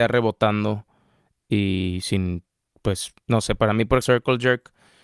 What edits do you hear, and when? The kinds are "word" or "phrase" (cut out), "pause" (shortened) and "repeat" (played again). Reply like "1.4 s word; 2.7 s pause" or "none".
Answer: 4.0 s word